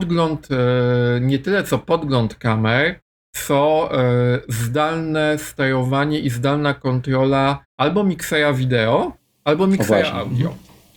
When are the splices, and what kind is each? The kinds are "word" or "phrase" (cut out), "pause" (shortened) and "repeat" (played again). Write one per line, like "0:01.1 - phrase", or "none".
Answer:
0:03.2 - pause
0:07.7 - pause